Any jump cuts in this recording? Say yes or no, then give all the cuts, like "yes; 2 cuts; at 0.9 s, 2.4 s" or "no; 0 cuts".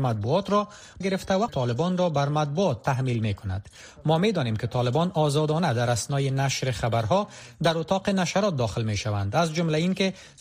yes; 2 cuts; at 1.0 s, 1.5 s